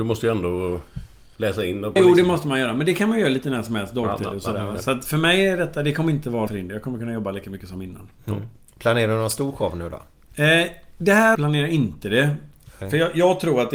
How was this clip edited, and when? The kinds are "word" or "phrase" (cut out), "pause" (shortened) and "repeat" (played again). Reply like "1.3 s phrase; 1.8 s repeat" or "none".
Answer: 2.0 s phrase; 6.5 s word; 11.3 s word